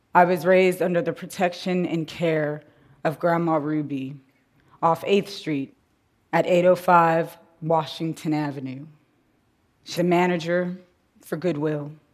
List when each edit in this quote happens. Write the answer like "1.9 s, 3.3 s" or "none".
10.0 s